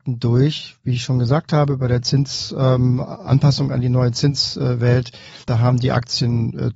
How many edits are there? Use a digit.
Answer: 1